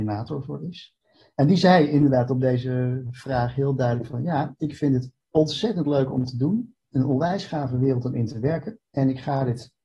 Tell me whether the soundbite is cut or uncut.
uncut